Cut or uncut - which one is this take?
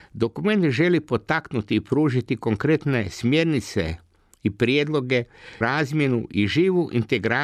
cut